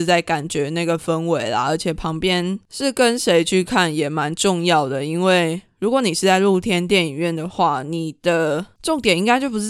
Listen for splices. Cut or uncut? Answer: uncut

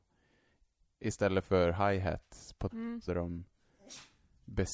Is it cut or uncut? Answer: cut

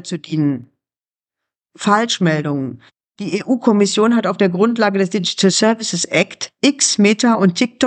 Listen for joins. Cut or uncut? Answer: uncut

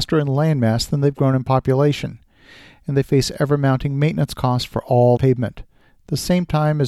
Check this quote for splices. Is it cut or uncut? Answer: cut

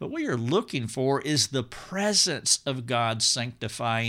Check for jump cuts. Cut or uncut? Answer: uncut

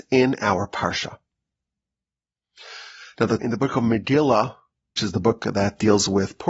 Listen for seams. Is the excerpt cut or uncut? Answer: cut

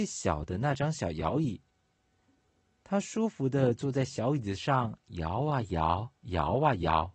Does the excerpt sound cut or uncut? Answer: cut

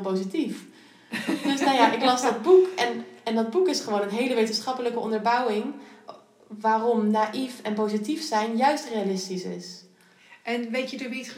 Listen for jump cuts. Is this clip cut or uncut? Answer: uncut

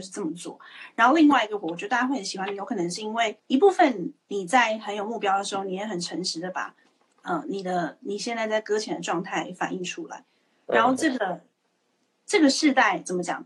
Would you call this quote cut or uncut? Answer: cut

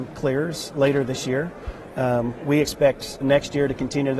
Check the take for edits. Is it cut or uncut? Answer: cut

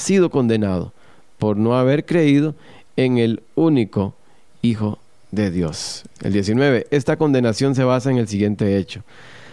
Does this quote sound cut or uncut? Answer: uncut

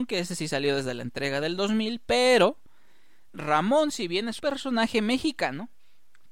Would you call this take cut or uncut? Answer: cut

